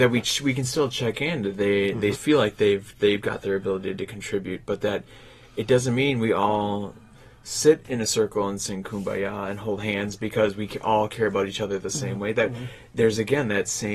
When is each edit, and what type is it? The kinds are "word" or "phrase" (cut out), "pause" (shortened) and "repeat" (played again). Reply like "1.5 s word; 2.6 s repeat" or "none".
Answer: 2.1 s word